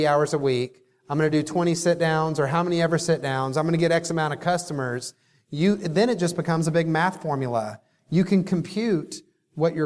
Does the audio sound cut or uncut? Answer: uncut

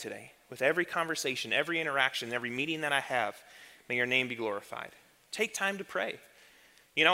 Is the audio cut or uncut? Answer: uncut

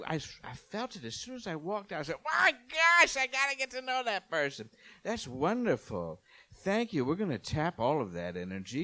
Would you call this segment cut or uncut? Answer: uncut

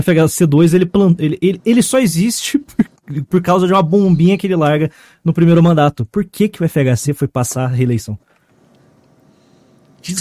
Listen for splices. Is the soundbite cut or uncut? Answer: uncut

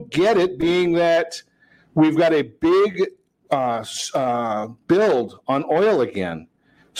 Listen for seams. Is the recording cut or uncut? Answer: uncut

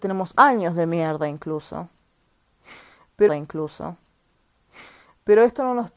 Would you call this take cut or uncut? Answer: cut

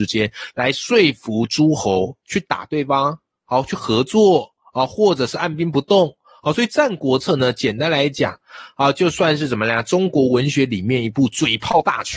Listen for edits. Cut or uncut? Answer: uncut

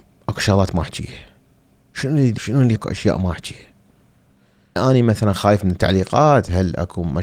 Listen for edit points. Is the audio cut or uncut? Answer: cut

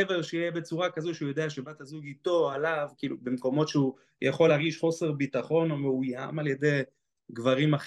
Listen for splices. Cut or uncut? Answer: uncut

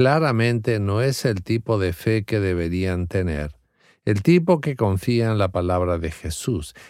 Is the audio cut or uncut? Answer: uncut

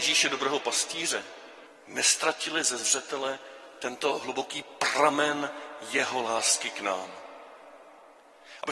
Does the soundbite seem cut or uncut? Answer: cut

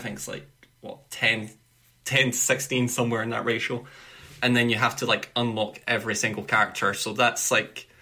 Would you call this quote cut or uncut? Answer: uncut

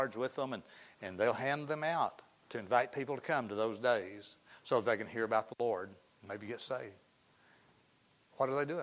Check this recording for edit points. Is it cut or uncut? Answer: uncut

